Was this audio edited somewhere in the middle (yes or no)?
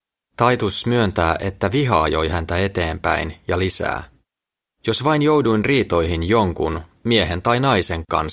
no